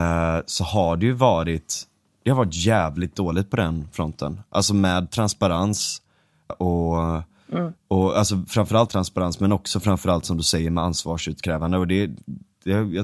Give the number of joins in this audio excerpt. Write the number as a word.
two